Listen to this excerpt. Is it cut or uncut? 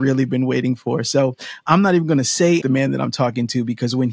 cut